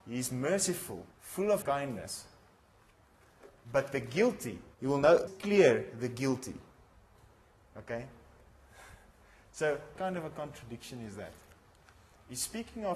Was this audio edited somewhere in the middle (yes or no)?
yes